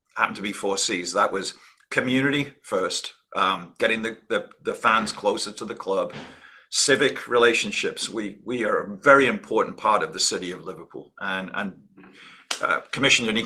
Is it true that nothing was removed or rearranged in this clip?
yes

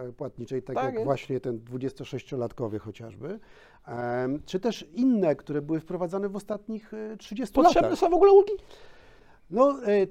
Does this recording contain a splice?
no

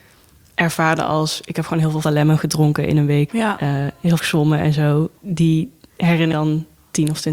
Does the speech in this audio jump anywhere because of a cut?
yes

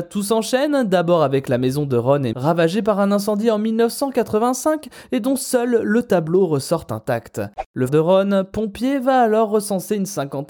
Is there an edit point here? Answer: yes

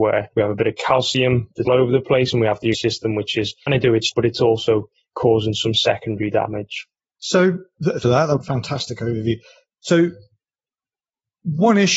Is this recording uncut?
no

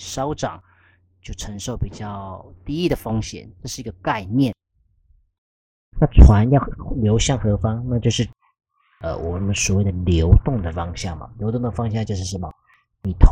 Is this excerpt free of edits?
yes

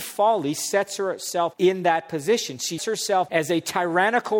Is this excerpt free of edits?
no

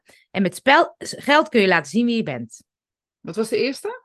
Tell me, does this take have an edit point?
no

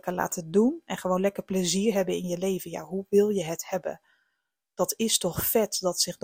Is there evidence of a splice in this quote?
no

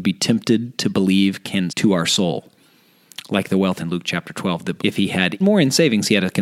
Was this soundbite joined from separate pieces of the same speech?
yes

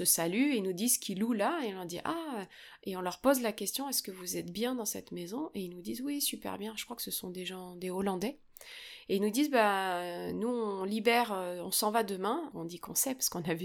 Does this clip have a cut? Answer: yes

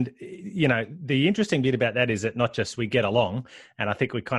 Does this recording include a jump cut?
no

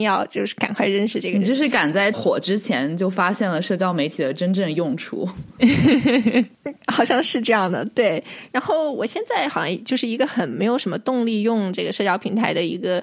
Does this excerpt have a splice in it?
yes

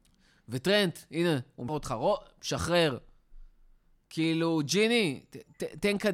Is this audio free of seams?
no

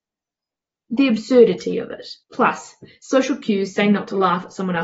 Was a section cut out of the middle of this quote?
yes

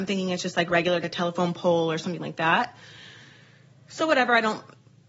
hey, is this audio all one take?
no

